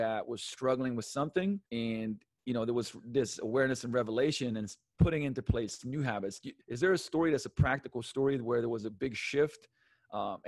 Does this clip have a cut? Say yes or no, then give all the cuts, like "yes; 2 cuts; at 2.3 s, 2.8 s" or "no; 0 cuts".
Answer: yes; 2 cuts; at 1.7 s, 6.6 s